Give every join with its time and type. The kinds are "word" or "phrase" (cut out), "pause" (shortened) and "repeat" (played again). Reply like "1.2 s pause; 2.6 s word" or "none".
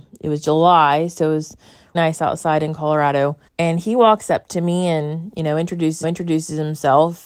1.9 s word; 3.5 s pause; 6.0 s repeat